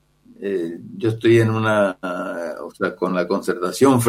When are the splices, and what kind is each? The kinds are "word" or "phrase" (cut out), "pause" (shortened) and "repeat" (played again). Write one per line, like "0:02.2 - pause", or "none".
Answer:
none